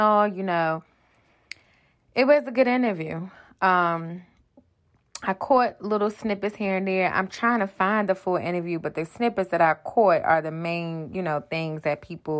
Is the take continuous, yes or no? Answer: yes